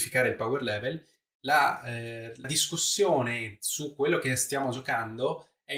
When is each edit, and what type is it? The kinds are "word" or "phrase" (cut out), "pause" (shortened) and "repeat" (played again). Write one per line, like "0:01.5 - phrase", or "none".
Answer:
0:02.4 - word